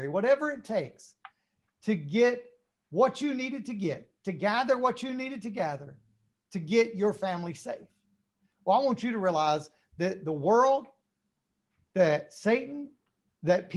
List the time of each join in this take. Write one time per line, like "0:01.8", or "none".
none